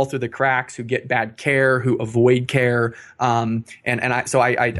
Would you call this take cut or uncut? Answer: uncut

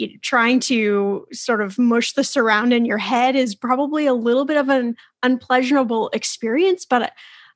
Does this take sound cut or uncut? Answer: uncut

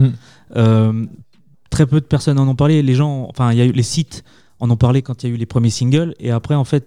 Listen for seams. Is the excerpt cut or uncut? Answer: uncut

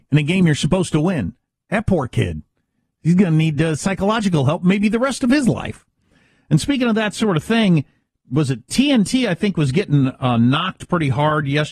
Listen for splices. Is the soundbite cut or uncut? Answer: uncut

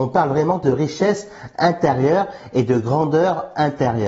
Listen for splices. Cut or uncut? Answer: uncut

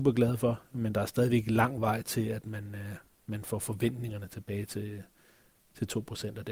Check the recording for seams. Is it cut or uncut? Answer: uncut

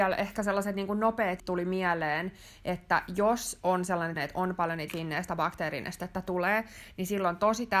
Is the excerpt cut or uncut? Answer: cut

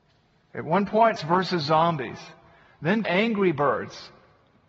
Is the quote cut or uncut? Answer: cut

